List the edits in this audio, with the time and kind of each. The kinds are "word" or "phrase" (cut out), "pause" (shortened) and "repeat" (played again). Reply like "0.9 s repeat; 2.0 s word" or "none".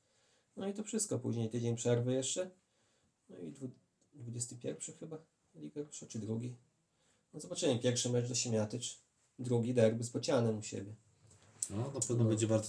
none

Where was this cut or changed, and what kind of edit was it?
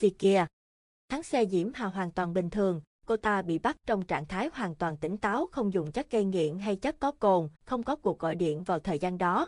7.5 s pause

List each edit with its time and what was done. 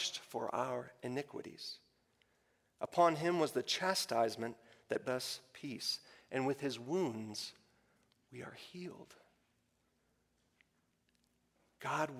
5.0 s word

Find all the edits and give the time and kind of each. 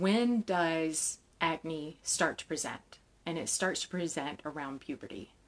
1.3 s word

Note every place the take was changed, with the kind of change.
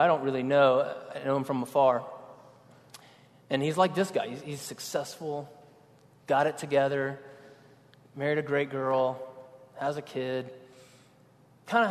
none

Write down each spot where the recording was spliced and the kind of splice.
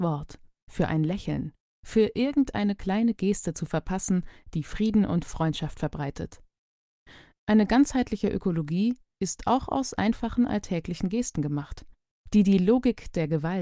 none

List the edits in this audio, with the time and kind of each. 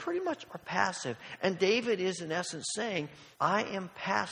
3.3 s pause

